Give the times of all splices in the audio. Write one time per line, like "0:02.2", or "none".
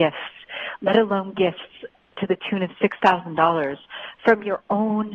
none